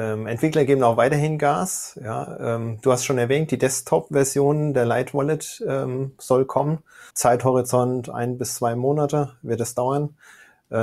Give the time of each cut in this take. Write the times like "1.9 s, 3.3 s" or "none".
7.1 s